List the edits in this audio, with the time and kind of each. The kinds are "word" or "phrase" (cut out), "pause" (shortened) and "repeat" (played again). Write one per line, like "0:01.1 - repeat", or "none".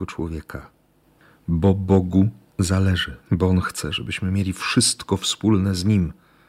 0:03.2 - pause